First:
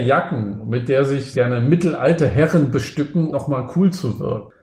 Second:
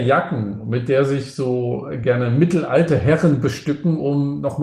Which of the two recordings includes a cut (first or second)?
first